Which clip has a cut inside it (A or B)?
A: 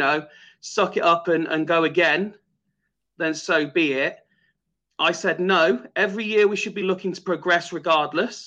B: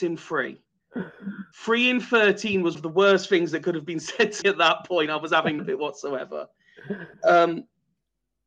B